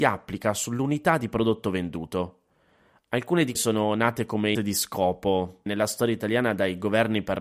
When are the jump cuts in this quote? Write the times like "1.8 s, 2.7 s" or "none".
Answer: 3.5 s, 4.5 s, 5.7 s